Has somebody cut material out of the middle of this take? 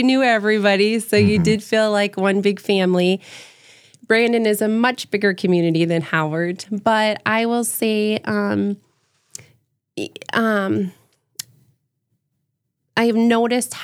no; 0 cuts

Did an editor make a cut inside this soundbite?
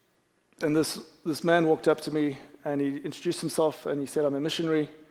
no; 0 cuts

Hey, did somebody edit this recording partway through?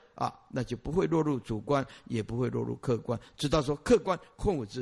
no; 0 cuts

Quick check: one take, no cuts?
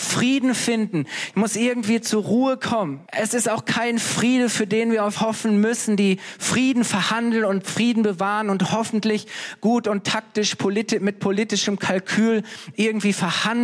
no; 2 cuts; at 3.1 s, 5.2 s

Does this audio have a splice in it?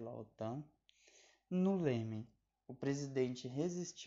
no; 0 cuts

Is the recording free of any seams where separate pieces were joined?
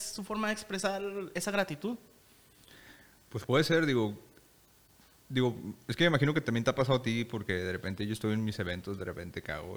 yes; 0 cuts

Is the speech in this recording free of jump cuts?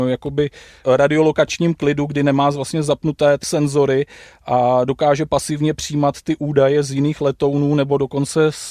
no; 1 cut; at 3.4 s

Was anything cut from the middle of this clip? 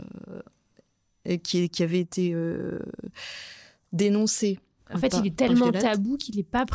no; 0 cuts

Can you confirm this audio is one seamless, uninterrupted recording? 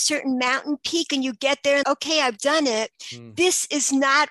no; 1 cut; at 1.8 s

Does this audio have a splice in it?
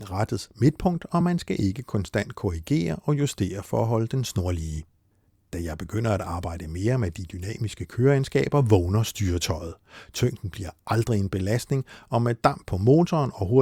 no; 0 cuts

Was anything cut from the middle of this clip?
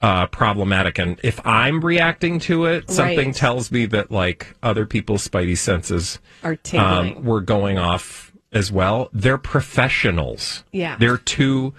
yes; 1 cut; at 8.4 s

